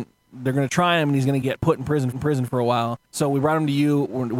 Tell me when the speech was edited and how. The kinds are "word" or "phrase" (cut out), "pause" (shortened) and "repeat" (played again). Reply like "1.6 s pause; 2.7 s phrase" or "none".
1.4 s word; 2.1 s repeat; 3.1 s pause